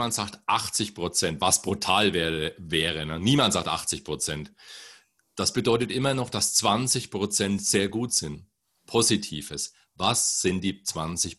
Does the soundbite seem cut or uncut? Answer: uncut